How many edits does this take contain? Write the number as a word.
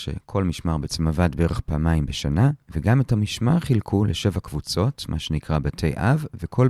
zero